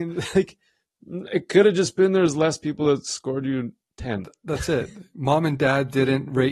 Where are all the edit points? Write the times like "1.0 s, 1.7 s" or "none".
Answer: none